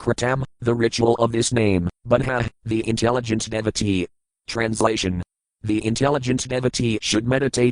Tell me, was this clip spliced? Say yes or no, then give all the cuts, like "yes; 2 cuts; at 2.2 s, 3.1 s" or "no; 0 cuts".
no; 0 cuts